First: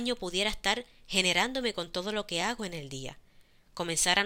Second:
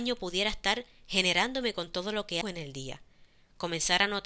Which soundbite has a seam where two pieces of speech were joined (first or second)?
second